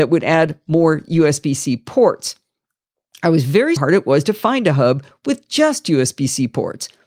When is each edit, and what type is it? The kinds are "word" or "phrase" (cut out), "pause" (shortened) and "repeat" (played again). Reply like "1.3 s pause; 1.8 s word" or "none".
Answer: 3.8 s phrase